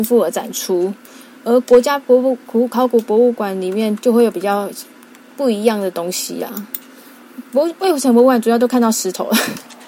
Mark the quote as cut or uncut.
uncut